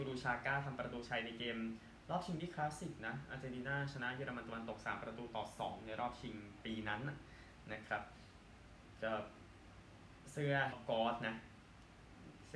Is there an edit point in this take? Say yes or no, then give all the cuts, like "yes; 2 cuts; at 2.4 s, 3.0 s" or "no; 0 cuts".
yes; 1 cut; at 10.7 s